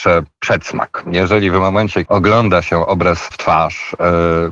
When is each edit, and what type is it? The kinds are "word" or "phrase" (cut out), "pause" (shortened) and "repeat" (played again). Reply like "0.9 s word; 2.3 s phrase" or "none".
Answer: 2.0 s word; 3.3 s word